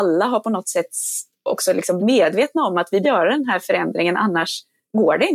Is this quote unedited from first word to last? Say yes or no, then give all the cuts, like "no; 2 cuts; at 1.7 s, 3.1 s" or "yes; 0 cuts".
no; 2 cuts; at 2.0 s, 3.0 s